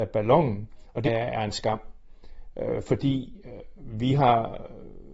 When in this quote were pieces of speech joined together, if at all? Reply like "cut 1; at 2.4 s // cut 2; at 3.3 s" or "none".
cut 1; at 1.0 s